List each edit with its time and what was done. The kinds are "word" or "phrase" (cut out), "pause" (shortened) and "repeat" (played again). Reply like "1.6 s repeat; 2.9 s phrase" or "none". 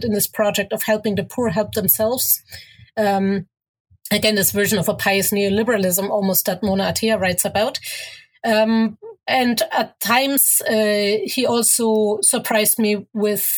9.2 s pause